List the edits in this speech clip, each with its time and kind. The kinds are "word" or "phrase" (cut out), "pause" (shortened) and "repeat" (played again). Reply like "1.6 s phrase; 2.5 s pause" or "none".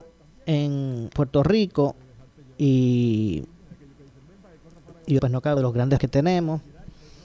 1.1 s word; 5.2 s word; 5.6 s word; 6.0 s word